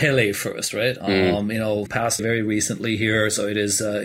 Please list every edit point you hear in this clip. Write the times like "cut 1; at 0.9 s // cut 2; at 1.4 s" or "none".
cut 1; at 1.0 s // cut 2; at 1.9 s // cut 3; at 2.2 s